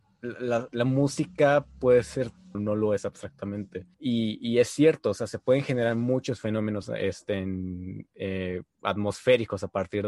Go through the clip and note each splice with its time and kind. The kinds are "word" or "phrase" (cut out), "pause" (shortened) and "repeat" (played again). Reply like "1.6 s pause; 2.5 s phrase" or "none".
2.5 s phrase; 3.9 s pause